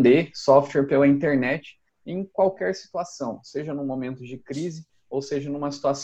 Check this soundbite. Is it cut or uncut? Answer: uncut